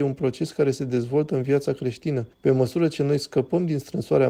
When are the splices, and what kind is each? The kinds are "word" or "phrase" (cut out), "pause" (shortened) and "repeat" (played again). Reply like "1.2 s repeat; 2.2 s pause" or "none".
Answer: 2.3 s pause